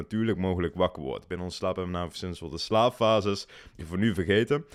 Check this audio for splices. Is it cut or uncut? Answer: cut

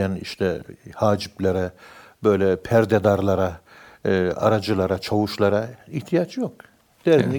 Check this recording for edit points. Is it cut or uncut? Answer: uncut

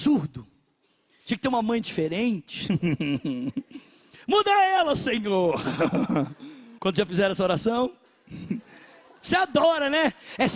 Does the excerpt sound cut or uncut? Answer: cut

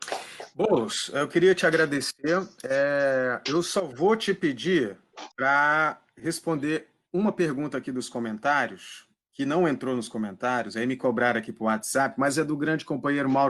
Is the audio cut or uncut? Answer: cut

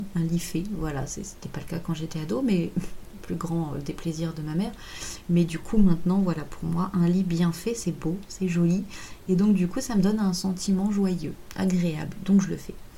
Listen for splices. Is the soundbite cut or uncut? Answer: uncut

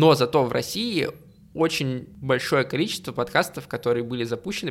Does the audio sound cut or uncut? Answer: uncut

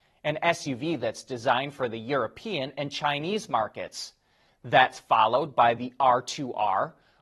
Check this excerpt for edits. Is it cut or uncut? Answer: uncut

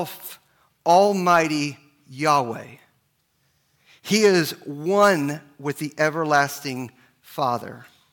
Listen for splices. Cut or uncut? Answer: uncut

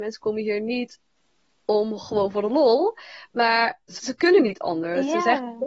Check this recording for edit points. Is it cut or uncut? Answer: cut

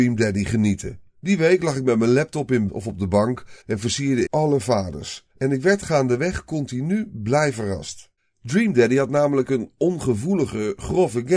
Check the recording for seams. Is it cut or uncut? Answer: cut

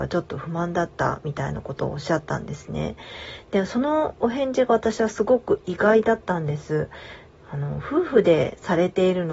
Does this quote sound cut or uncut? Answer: uncut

